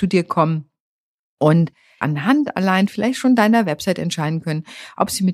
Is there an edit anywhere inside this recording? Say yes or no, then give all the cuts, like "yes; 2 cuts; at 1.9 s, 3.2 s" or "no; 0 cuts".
yes; 1 cut; at 2.0 s